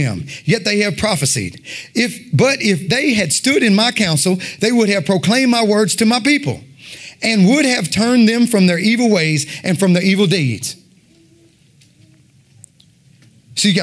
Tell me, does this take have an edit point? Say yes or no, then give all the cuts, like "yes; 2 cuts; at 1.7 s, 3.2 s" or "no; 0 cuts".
no; 0 cuts